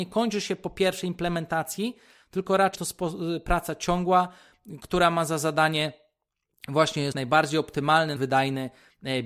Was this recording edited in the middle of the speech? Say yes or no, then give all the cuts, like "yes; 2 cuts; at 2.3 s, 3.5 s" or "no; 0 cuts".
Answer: yes; 3 cuts; at 2.8 s, 7.1 s, 8.2 s